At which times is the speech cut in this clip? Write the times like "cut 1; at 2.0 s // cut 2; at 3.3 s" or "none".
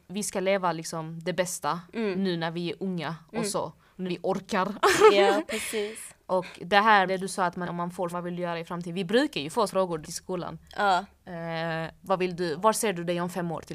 cut 1; at 4.1 s // cut 2; at 7.1 s // cut 3; at 7.6 s // cut 4; at 8.1 s // cut 5; at 9.7 s // cut 6; at 10.0 s // cut 7; at 12.0 s // cut 8; at 12.6 s